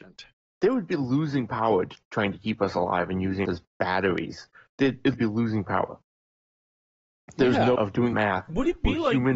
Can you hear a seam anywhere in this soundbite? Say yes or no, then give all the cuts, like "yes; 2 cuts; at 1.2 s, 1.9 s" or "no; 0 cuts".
yes; 4 cuts; at 3.5 s, 5.1 s, 7.8 s, 8.1 s